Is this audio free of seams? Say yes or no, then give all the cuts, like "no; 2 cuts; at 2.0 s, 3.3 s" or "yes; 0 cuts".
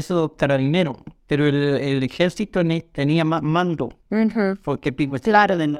no; 2 cuts; at 1.2 s, 4.0 s